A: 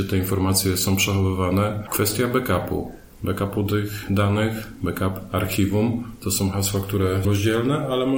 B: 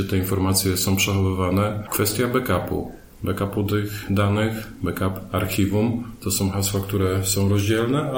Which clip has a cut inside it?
A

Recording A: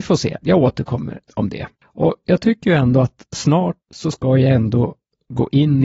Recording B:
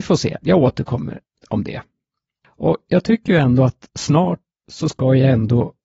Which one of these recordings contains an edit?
A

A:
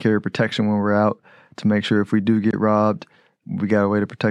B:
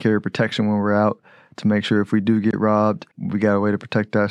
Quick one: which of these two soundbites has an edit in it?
B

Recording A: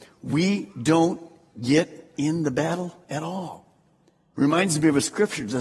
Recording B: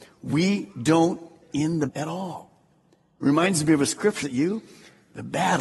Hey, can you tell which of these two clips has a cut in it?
B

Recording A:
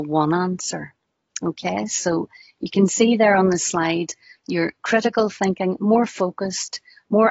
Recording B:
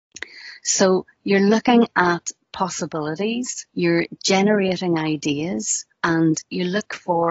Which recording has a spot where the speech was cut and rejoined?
B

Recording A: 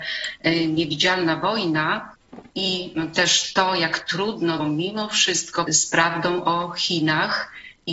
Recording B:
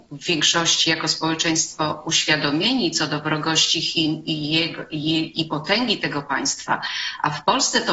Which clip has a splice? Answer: A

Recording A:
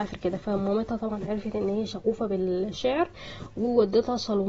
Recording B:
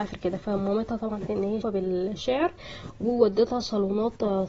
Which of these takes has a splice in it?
B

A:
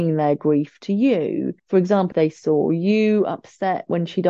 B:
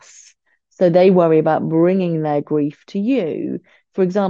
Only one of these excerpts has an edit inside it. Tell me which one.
A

